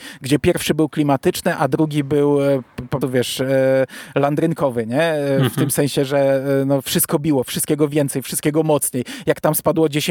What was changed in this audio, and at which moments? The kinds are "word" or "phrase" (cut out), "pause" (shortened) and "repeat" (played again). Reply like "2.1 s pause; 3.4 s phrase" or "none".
3.0 s word